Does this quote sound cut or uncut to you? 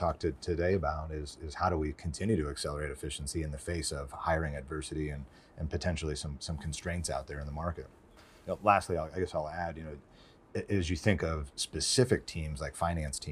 uncut